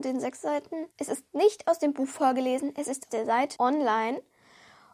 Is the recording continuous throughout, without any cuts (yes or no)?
no